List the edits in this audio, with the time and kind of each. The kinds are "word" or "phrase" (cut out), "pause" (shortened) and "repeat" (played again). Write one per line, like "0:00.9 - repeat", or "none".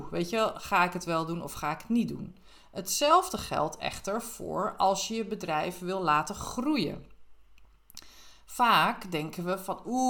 none

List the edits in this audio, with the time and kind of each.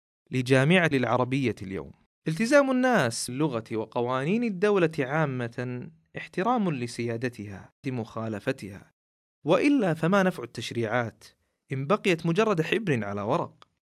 0:00.9 - word
0:02.1 - pause
0:03.3 - word
0:07.8 - phrase

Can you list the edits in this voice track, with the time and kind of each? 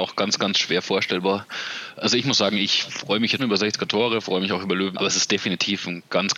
0:03.4 - word
0:04.9 - word

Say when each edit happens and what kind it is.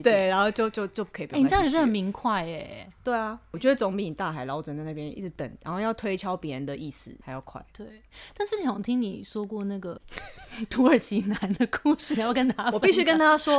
0:07.2 - pause

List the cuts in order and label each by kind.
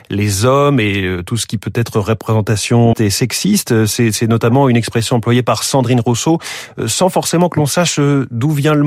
0:02.9 - word

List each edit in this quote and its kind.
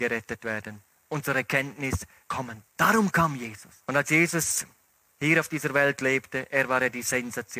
0:02.2 - phrase
0:02.7 - pause
0:03.8 - pause

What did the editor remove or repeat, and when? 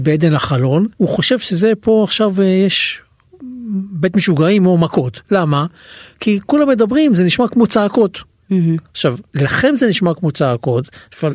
0:00.9 - pause
0:05.2 - pause
0:09.3 - pause

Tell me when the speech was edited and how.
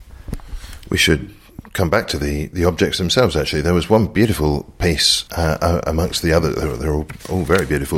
0:05.3 - pause

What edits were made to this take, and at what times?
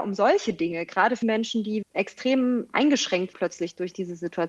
0:01.2 - word
0:01.8 - word
0:03.3 - word

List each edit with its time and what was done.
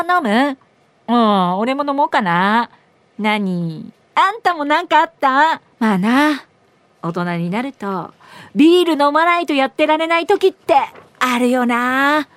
0:05.7 - pause

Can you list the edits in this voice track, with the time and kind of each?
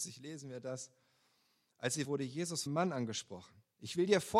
0:02.0 - word
0:02.7 - word

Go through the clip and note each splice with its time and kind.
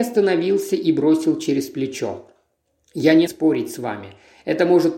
0:03.3 - word

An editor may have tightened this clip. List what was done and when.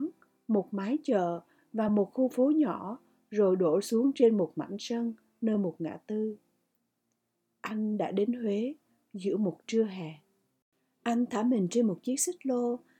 none

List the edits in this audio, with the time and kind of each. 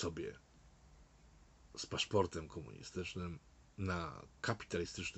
none

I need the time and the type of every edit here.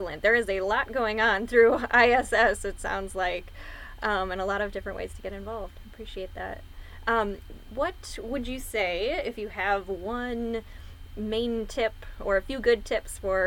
none

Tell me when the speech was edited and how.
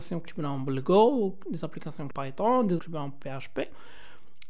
0:02.1 - word
0:02.8 - word

